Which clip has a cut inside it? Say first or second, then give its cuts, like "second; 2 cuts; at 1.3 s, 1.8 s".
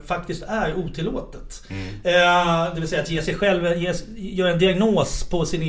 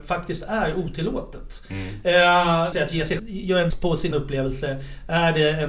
second; 4 cuts; at 2.7 s, 3.2 s, 3.7 s, 4.1 s